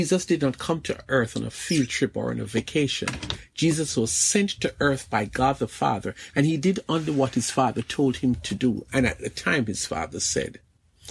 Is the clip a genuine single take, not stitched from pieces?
yes; 0 cuts

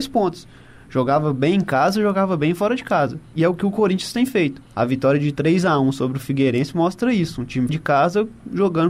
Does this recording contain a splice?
yes; 2 cuts; at 4.7 s, 7.7 s

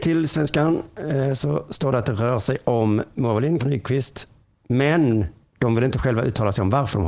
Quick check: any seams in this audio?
yes; 1 cut; at 3.6 s

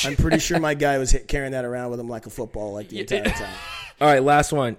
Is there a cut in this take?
no; 0 cuts

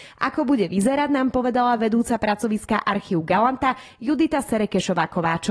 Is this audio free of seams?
yes; 0 cuts

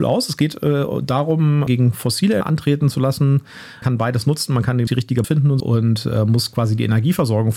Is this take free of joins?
no; 6 cuts; at 1.7 s, 2.4 s, 3.8 s, 4.9 s, 5.2 s, 5.6 s

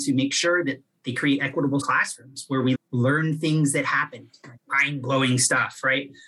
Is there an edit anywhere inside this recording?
yes; 3 cuts; at 1.8 s, 2.7 s, 4.6 s

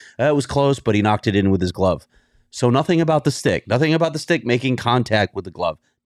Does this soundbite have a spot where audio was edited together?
no; 0 cuts

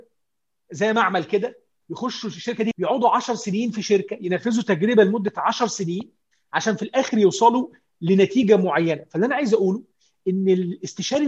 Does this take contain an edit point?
yes; 1 cut; at 2.7 s

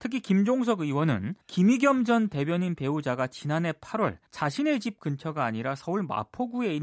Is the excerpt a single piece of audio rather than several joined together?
no; 2 cuts; at 1.4 s, 4.3 s

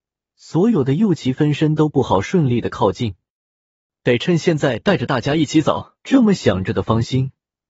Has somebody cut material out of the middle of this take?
yes; 1 cut; at 6.0 s

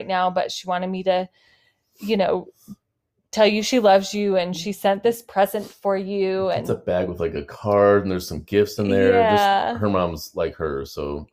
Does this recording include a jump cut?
no; 0 cuts

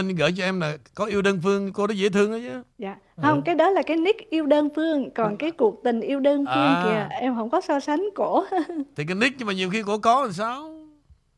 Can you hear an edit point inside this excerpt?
yes; 1 cut; at 2.7 s

